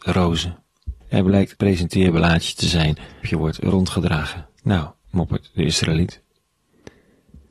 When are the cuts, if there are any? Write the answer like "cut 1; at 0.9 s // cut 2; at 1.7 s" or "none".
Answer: cut 1; at 1.0 s // cut 2; at 1.6 s // cut 3; at 3.2 s // cut 4; at 4.6 s